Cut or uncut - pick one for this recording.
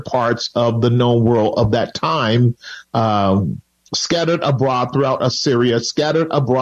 uncut